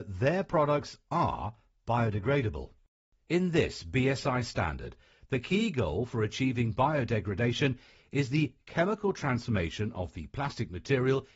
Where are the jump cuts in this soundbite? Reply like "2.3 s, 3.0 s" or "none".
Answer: none

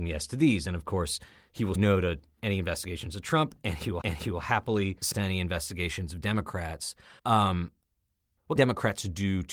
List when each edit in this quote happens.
1.7 s, 4.0 s, 5.1 s, 7.2 s, 8.6 s

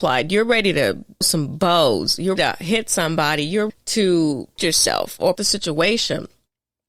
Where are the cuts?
1.2 s, 2.4 s, 3.7 s, 4.6 s, 5.4 s

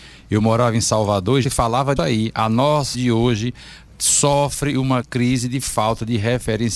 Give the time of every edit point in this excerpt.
1.4 s, 2.0 s, 2.9 s, 3.9 s, 5.0 s

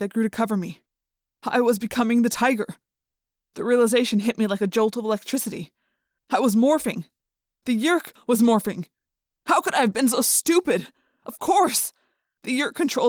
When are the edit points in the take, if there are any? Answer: none

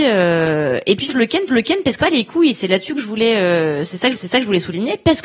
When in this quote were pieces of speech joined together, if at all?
1.1 s, 1.5 s, 2.0 s, 4.2 s

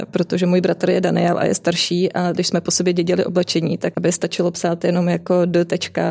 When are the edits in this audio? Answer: 3.9 s

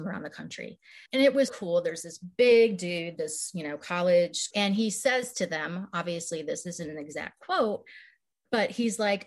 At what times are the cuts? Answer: 1.1 s, 1.5 s, 4.5 s

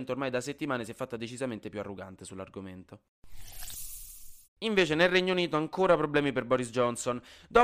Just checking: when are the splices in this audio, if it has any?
4.4 s

